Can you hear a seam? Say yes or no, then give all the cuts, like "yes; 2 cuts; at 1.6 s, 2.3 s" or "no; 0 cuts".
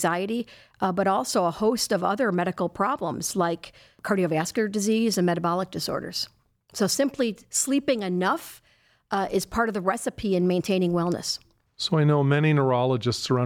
no; 0 cuts